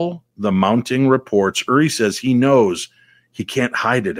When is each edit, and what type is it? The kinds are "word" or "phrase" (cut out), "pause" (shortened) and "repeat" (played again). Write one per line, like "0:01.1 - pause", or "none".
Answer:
none